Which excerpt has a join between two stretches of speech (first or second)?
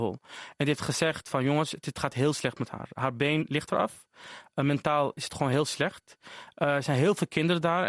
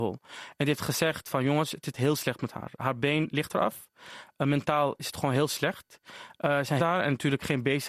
second